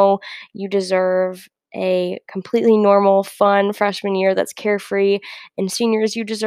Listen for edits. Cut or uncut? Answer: uncut